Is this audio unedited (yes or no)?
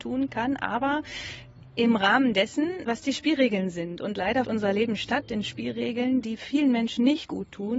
no